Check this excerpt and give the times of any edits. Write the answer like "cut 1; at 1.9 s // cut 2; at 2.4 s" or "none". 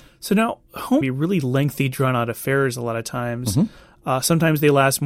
cut 1; at 1.0 s